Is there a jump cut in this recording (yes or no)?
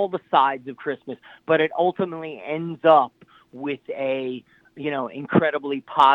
no